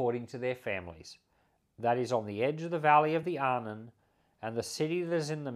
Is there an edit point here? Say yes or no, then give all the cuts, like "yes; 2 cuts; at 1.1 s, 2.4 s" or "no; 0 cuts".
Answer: no; 0 cuts